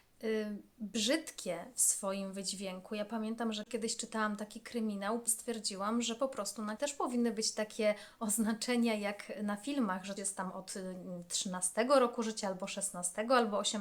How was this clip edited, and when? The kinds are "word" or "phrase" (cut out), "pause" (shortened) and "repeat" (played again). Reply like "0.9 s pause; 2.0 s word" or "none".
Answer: 5.3 s word; 6.8 s word; 10.2 s word